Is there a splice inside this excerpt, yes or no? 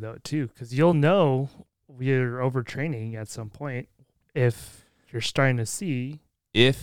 no